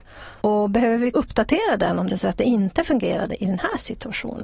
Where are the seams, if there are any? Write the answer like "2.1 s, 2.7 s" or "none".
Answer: 1.1 s, 2.1 s